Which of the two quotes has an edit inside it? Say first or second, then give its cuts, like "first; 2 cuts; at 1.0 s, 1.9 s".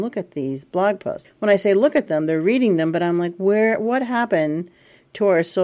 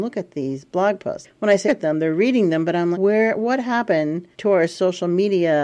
second; 3 cuts; at 1.7 s, 2.9 s, 4.3 s